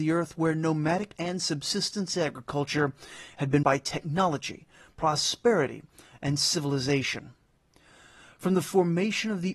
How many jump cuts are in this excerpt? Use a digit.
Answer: 2